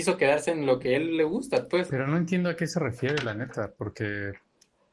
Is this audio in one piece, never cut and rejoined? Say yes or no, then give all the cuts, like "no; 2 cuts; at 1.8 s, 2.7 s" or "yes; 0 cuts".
yes; 0 cuts